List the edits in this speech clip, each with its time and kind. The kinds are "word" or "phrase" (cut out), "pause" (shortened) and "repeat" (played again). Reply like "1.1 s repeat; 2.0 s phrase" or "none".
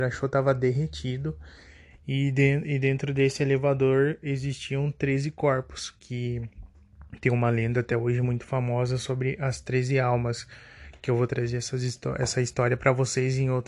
none